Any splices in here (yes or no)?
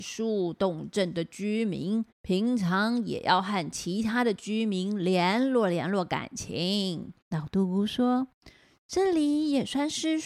yes